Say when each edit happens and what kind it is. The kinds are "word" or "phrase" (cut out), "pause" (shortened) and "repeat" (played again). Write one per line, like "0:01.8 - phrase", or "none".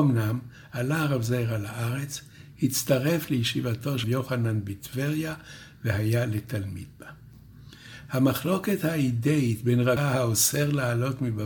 0:04.0 - word
0:10.0 - word